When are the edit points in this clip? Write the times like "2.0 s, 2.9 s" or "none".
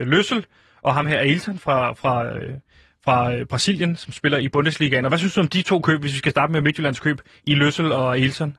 none